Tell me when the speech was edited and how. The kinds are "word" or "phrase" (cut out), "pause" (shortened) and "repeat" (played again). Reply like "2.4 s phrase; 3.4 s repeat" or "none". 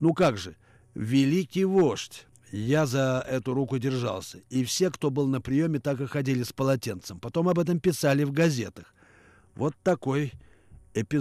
2.3 s pause